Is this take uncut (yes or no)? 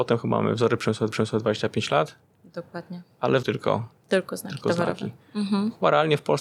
no